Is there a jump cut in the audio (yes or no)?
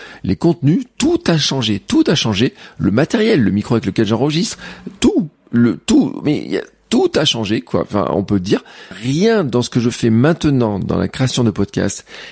yes